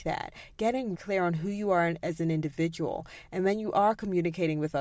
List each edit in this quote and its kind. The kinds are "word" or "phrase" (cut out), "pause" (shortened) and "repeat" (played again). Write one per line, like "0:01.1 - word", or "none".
0:00.9 - word